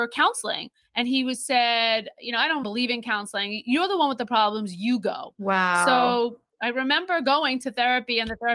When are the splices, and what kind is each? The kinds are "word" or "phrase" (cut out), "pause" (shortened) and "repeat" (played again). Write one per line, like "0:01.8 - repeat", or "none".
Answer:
0:02.6 - word